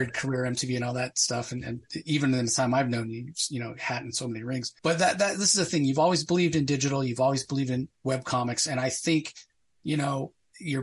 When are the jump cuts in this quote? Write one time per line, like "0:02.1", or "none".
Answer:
0:04.8